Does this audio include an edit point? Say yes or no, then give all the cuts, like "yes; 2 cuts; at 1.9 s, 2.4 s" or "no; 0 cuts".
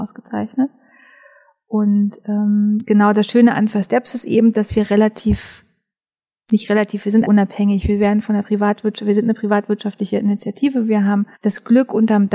yes; 2 cuts; at 7.2 s, 11.3 s